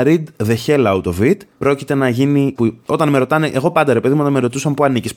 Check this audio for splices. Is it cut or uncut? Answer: cut